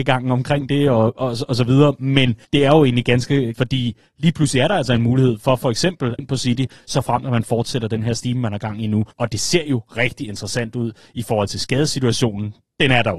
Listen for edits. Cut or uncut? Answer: cut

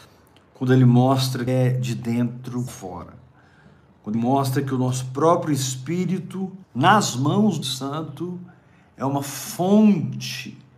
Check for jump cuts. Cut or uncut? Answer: cut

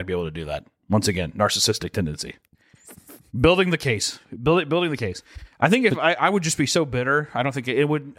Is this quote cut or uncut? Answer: uncut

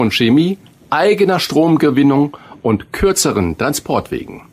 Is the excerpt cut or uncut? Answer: uncut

